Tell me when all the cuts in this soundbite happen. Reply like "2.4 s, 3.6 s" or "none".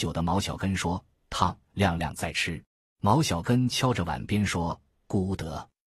2.7 s

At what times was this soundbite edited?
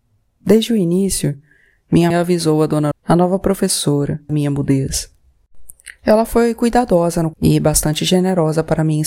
2.1 s, 2.9 s, 4.3 s, 7.3 s

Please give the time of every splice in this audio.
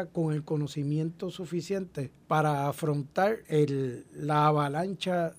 2.2 s, 3.4 s

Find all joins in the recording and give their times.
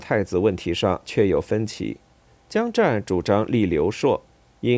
2.3 s

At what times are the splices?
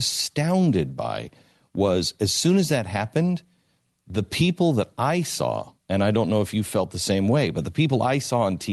none

